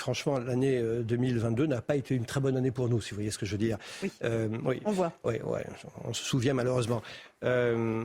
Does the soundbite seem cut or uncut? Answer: uncut